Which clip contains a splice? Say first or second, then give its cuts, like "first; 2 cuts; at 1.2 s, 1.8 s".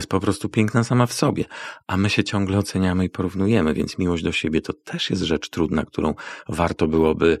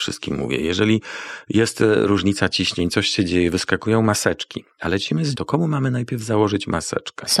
second; 1 cut; at 5.3 s